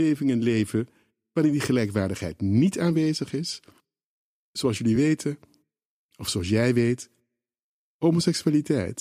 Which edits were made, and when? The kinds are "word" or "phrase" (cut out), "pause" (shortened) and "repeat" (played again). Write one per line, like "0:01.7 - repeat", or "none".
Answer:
none